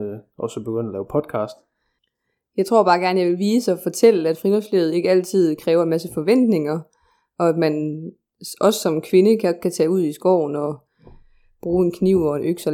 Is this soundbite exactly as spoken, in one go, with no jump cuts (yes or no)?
yes